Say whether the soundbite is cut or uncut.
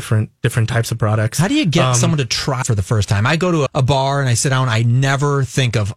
cut